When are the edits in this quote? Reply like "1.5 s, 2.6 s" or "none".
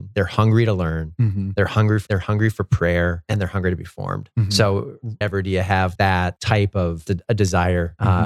2.1 s, 5.2 s, 5.9 s, 7.1 s